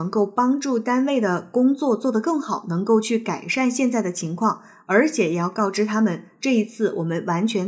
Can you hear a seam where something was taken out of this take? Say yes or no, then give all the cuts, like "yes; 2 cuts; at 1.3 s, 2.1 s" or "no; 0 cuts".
no; 0 cuts